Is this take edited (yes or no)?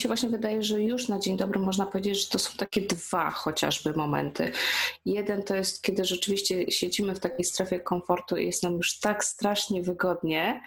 no